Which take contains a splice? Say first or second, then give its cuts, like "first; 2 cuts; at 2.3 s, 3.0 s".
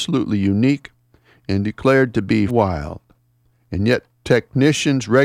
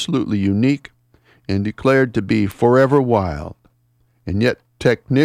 first; 1 cut; at 2.5 s